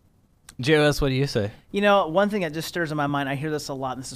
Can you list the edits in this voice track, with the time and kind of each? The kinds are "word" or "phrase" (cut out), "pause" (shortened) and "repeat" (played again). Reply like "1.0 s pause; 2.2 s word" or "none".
none